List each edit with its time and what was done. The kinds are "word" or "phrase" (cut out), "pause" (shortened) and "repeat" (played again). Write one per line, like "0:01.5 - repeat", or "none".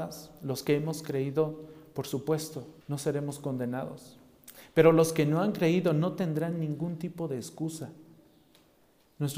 0:02.8 - pause

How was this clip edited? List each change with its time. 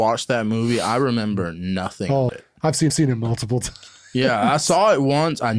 0:02.3 - word
0:02.9 - repeat

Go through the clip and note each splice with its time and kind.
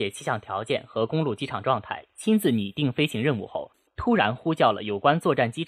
none

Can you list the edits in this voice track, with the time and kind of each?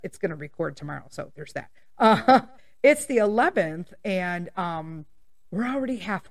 none

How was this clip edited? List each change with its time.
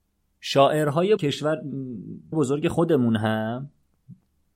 0:01.2 - word
0:02.3 - word

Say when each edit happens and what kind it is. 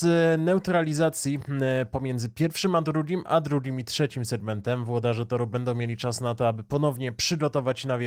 none

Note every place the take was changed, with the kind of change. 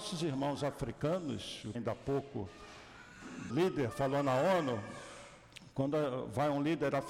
0:01.7 - phrase
0:03.5 - word
0:03.9 - word

